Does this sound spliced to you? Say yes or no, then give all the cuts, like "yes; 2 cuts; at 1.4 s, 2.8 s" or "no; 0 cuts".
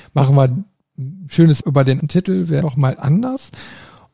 yes; 4 cuts; at 1.6 s, 2.0 s, 2.6 s, 3.0 s